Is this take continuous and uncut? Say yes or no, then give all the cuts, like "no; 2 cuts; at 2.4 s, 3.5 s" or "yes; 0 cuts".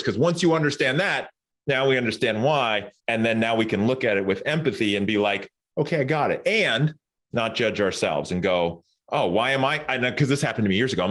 no; 1 cut; at 3.0 s